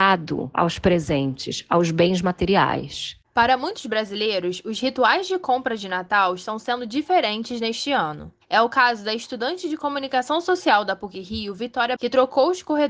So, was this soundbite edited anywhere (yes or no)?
yes